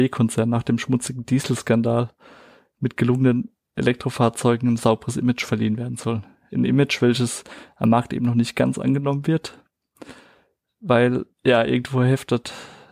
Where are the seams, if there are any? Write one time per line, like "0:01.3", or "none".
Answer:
0:11.3